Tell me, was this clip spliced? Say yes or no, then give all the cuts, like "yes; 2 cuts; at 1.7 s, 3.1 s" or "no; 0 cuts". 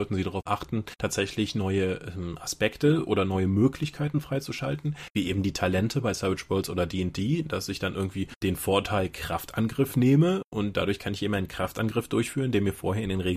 no; 0 cuts